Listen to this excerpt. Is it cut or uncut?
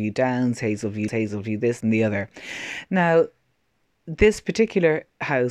cut